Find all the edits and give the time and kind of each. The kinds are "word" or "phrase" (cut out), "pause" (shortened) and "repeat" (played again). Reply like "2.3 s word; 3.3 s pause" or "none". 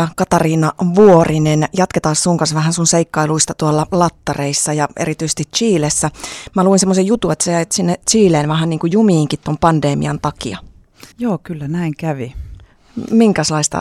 11.1 s pause

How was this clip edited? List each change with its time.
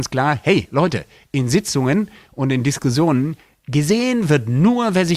none

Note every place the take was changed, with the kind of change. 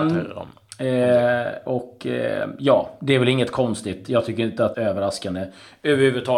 4.7 s phrase

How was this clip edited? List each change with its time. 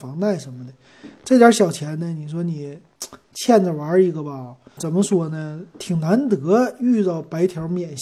4.8 s word

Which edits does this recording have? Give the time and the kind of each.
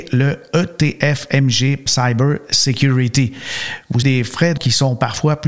1.9 s word; 4.0 s word; 4.6 s word

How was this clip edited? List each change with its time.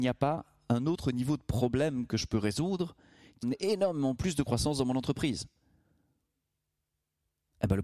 3.4 s word

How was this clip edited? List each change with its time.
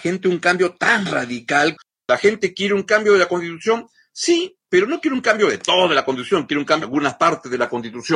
6.8 s word

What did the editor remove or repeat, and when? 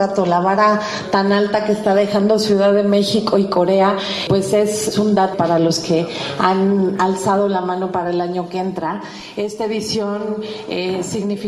5.3 s word

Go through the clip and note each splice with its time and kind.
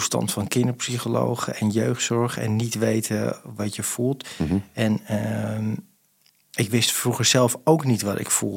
none

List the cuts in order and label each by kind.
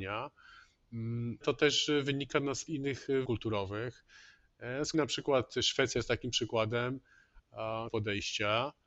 1.4 s word; 2.7 s word; 3.2 s word; 4.9 s word; 7.9 s word

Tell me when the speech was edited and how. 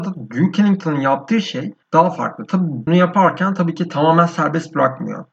1.8 s pause; 2.9 s word

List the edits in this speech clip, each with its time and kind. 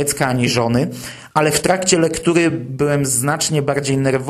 none

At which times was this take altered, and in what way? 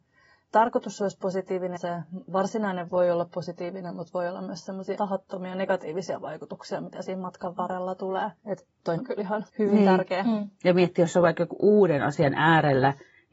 1.8 s word; 2.9 s word; 5.0 s word; 8.4 s pause; 9.0 s word; 9.5 s pause

